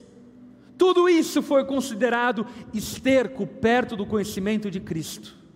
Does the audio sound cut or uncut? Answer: uncut